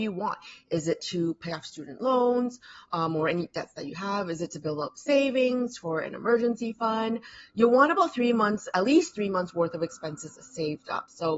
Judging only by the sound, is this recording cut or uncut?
uncut